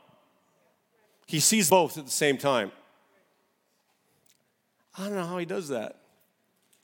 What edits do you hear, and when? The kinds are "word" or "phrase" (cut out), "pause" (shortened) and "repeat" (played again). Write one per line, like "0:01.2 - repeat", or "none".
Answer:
0:01.7 - word

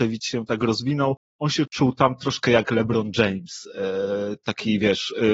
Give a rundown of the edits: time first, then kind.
none

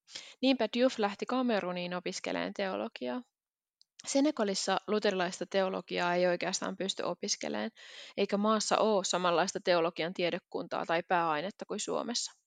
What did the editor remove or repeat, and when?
none

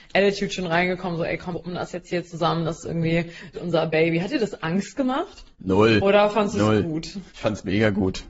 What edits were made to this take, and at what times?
0:01.5 - word
0:03.5 - word
0:05.5 - pause
0:07.3 - pause

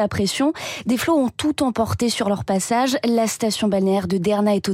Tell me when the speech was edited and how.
none

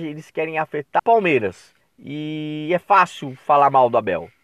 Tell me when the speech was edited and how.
0:01.0 - word
0:01.8 - pause

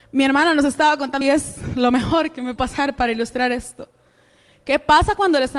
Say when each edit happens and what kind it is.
0:01.2 - phrase
0:02.6 - word

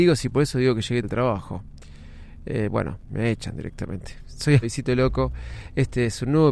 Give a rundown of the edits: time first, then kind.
0:01.0 - word
0:03.1 - word
0:04.6 - word

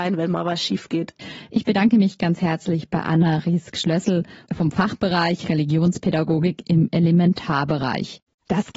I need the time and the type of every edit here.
none

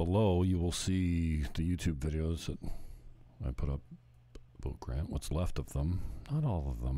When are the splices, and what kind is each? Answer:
0:04.5 - pause

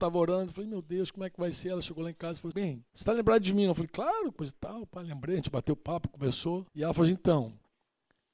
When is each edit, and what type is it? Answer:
0:02.5 - word
0:02.9 - pause
0:06.7 - pause

